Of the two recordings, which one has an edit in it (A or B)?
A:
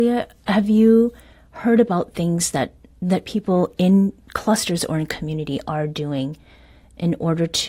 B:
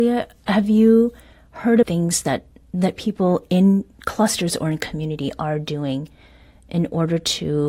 B